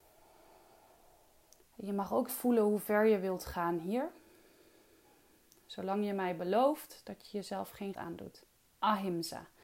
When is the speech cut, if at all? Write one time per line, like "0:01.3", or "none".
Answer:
0:02.3
0:07.9